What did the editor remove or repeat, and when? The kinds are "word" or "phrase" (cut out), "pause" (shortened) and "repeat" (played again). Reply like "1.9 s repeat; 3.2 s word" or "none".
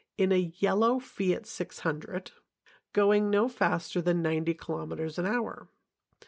none

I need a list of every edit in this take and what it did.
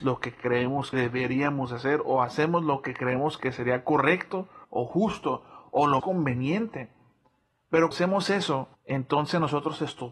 0.9 s word; 4.6 s pause; 6.0 s word; 7.9 s word; 8.7 s pause

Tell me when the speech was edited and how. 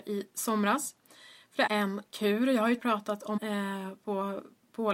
1.7 s phrase; 2.8 s word; 3.4 s word

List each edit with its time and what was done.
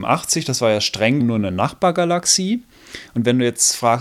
1.2 s word

